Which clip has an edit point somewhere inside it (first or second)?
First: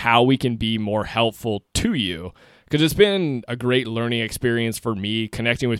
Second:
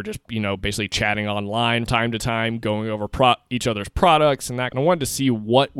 second